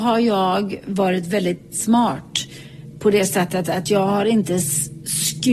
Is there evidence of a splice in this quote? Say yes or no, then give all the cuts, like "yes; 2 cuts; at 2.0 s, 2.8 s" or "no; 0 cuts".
no; 0 cuts